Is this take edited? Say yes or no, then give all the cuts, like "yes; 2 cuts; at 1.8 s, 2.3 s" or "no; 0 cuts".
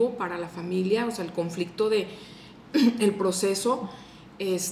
no; 0 cuts